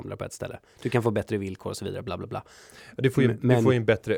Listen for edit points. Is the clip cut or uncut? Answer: uncut